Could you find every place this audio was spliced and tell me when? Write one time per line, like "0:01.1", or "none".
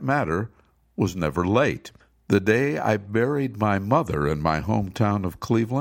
0:02.0